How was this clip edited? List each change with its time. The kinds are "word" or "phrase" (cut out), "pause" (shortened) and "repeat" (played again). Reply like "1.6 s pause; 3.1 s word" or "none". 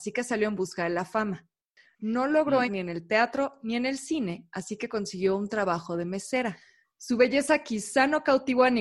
2.7 s word

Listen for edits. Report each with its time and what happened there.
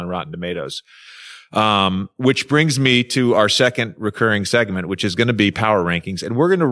none

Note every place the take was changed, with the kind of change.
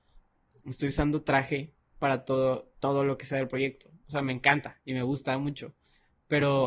1.8 s pause

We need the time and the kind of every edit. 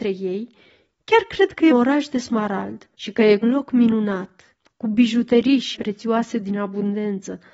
1.7 s word; 2.9 s pause; 3.4 s phrase; 5.7 s word

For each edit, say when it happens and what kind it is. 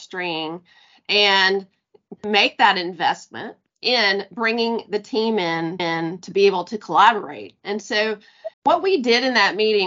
5.8 s repeat; 8.5 s pause

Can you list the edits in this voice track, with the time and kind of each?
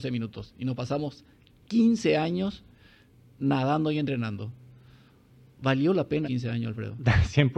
6.2 s word

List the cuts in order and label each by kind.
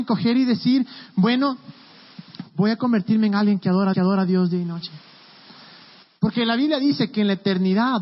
3.9 s repeat; 5.8 s pause

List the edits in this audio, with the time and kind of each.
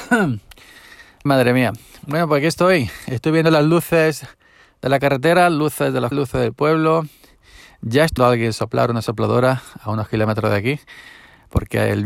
1.3 s word; 6.1 s word; 8.2 s word

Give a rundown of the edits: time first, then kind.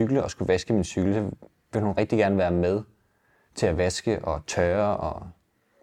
none

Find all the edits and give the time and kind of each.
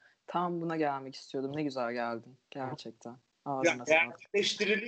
2.4 s pause

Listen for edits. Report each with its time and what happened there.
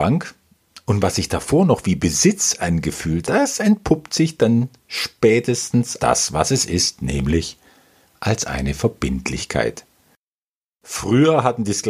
3.2 s word; 6.0 s word

